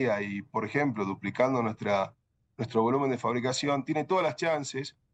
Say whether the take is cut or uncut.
uncut